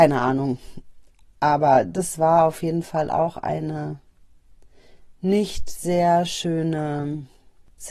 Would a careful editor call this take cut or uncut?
uncut